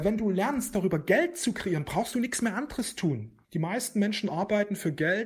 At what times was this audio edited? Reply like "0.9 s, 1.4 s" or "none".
3.4 s